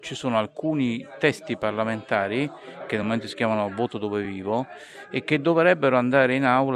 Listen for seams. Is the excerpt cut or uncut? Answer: uncut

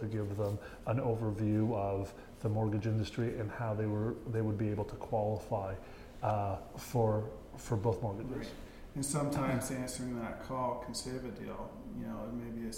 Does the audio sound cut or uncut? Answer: uncut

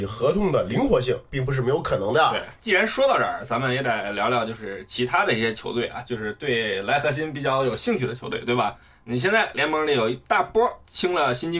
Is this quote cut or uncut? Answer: uncut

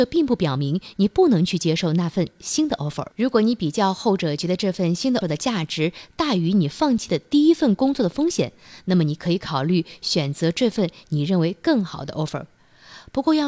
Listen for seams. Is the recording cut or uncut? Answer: cut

